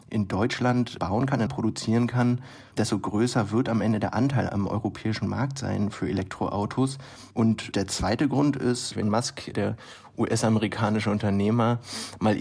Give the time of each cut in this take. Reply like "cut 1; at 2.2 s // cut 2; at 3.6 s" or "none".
cut 1; at 1.5 s // cut 2; at 9.0 s